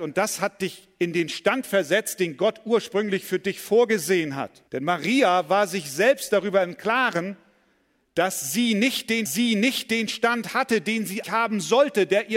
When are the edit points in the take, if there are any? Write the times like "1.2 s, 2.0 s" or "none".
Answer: 4.7 s, 9.3 s, 11.2 s